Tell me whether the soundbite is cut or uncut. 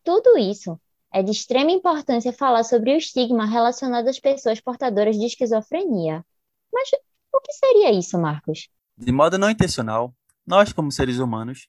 uncut